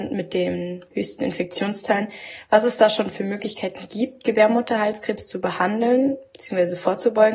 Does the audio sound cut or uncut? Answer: uncut